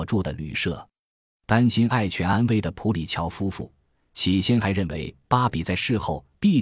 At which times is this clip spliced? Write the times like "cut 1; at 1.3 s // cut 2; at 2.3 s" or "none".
none